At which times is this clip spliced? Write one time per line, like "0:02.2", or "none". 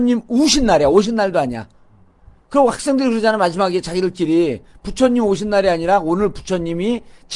none